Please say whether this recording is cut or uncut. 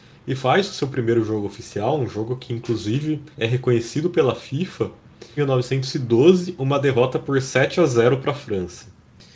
cut